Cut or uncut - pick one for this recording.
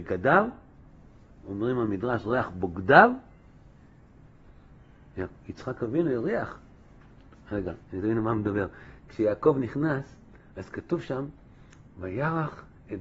cut